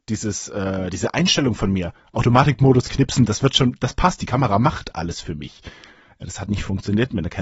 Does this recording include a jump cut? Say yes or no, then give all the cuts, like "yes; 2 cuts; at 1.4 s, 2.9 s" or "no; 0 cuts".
yes; 1 cut; at 6.5 s